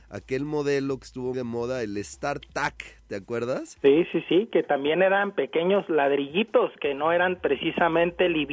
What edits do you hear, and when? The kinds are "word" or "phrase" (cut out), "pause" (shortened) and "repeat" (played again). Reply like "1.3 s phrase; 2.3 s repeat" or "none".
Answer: 1.3 s word